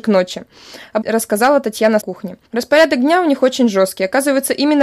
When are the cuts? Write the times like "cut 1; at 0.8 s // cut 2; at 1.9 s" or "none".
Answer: cut 1; at 1.0 s // cut 2; at 2.0 s // cut 3; at 2.5 s